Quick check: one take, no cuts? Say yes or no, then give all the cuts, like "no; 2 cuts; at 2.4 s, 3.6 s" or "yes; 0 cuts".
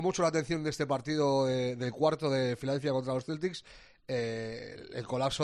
yes; 0 cuts